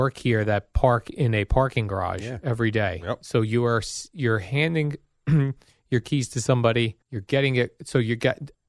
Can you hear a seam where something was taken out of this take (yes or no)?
yes